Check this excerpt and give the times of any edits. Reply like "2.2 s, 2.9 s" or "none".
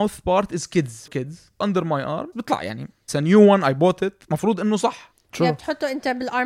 1.1 s, 1.6 s, 2.3 s, 3.1 s